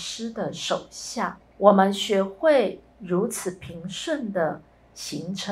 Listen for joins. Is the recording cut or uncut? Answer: cut